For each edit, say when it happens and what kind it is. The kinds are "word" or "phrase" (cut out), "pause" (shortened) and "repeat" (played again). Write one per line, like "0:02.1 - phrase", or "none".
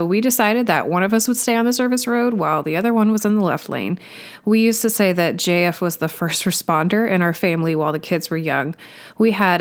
none